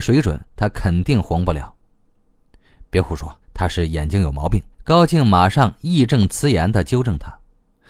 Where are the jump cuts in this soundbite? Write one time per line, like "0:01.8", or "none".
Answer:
0:03.4
0:04.7